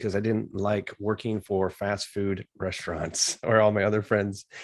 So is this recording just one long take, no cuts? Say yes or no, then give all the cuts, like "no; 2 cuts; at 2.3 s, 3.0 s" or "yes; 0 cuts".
yes; 0 cuts